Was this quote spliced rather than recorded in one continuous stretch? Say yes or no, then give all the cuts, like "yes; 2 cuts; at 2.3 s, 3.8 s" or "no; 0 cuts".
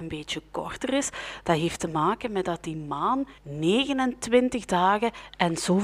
yes; 1 cut; at 3.4 s